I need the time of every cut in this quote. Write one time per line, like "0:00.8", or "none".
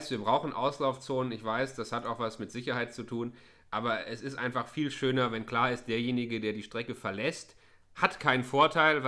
none